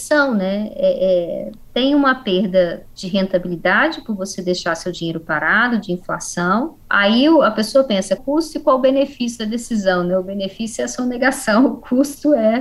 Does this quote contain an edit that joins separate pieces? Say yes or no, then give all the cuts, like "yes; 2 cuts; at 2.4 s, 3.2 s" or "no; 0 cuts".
yes; 4 cuts; at 1.7 s, 3.0 s, 6.8 s, 8.2 s